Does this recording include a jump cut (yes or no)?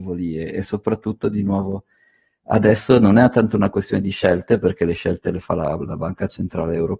no